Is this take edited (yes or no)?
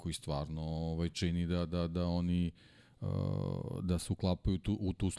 no